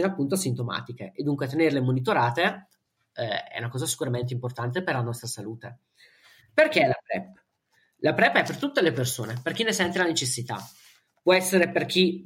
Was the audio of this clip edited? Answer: no; 0 cuts

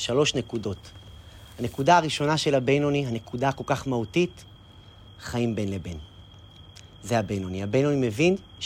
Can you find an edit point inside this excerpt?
no; 0 cuts

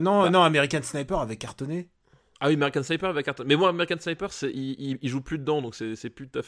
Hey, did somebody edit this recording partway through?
no; 0 cuts

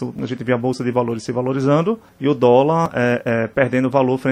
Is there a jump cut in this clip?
yes; 1 cut; at 2.1 s

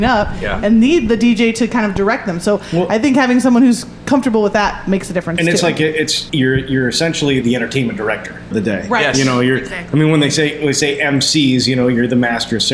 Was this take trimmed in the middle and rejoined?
yes; 3 cuts; at 6.3 s, 7.4 s, 8.5 s

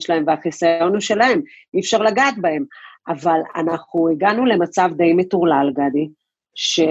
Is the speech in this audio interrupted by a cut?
no; 0 cuts

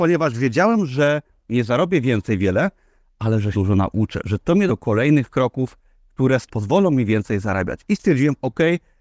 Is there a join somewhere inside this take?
yes; 3 cuts; at 3.5 s, 4.7 s, 6.5 s

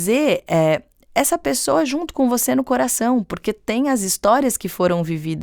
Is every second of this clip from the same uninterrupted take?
yes; 0 cuts

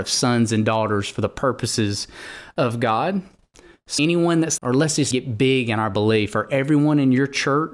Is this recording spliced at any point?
yes; 3 cuts; at 4.0 s, 4.6 s, 5.1 s

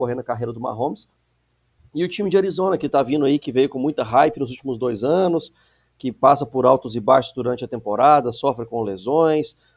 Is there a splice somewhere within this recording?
no; 0 cuts

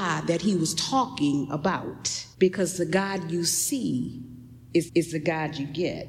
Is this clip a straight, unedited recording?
no; 2 cuts; at 2.3 s, 4.9 s

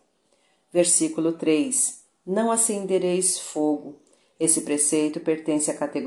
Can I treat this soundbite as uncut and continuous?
yes; 0 cuts

